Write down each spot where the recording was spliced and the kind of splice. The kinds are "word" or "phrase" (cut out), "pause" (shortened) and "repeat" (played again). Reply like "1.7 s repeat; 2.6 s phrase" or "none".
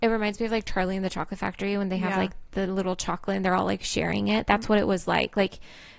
none